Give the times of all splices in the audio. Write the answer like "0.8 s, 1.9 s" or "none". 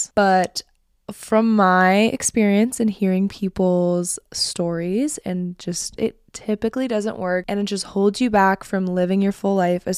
6.0 s